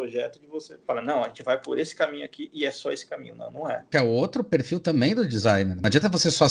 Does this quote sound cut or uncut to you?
uncut